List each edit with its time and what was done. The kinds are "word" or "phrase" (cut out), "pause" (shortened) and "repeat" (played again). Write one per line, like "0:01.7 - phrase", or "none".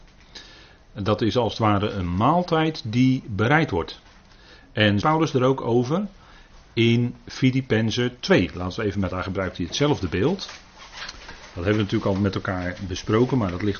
0:05.0 - phrase
0:09.1 - phrase